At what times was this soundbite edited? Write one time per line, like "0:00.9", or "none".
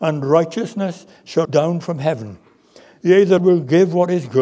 0:01.4
0:03.4